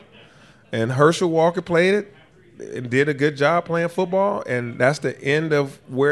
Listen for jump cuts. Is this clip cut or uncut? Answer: uncut